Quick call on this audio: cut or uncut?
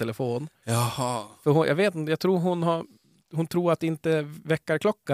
uncut